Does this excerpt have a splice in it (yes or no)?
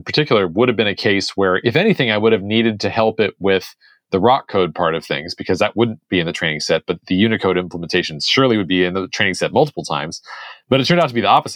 no